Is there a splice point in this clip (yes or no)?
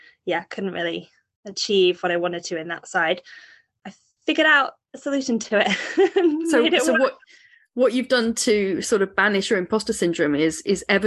no